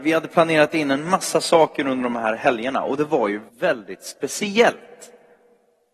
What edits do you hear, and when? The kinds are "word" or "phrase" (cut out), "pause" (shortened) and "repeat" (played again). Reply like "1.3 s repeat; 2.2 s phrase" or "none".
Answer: 3.5 s word